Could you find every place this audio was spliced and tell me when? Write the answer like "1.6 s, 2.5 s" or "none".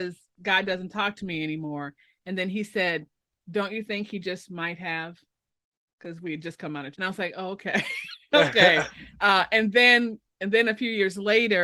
6.9 s